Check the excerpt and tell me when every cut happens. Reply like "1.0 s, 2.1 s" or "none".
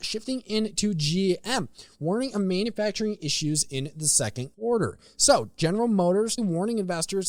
4.5 s, 6.4 s